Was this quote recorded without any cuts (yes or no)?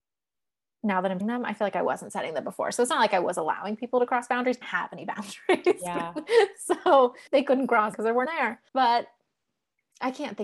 no